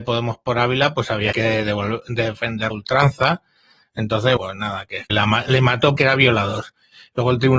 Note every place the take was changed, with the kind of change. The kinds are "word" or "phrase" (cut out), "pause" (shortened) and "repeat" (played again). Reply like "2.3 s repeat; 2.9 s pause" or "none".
1.3 s word; 2.7 s word; 4.4 s word; 5.1 s word; 5.4 s word; 6.0 s word